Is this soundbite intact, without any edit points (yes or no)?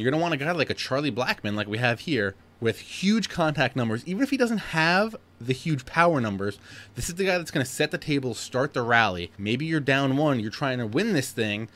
no